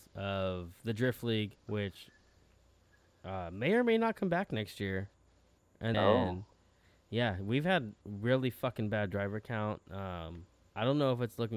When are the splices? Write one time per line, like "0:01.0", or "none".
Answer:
0:01.6
0:05.9